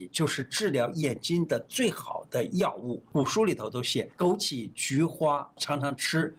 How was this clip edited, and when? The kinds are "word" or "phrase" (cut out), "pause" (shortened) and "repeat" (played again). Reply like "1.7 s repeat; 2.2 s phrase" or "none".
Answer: 4.1 s pause